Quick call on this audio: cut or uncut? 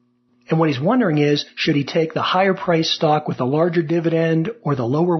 uncut